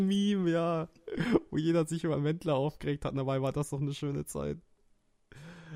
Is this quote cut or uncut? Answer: uncut